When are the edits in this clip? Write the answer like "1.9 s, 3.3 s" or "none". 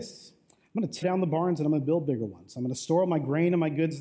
1.0 s